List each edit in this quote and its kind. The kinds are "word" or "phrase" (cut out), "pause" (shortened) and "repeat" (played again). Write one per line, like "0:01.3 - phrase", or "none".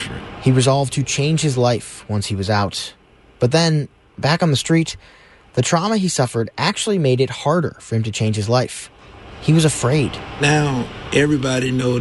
none